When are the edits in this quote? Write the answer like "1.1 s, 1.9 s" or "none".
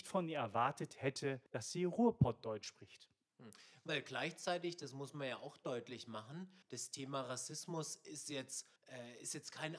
1.5 s, 6.6 s, 8.8 s